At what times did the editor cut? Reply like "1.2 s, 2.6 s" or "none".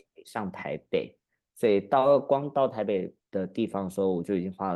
3.2 s